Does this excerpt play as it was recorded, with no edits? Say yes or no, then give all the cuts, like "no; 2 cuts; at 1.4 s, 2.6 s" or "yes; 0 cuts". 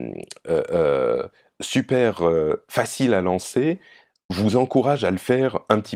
yes; 0 cuts